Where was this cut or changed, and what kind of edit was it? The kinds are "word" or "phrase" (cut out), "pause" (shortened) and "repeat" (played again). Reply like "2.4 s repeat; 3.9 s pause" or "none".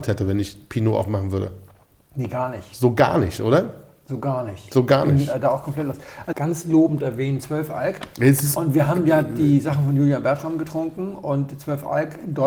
6.3 s phrase